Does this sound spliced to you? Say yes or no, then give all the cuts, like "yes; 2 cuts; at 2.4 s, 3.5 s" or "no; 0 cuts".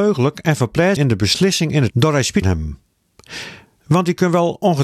yes; 3 cuts; at 1.0 s, 1.9 s, 2.4 s